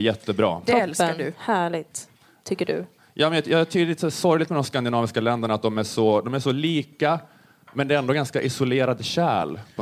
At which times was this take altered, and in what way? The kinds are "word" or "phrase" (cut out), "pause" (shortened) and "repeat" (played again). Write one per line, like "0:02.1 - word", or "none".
none